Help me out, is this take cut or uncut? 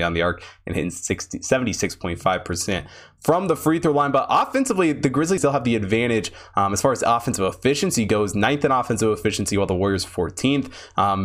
cut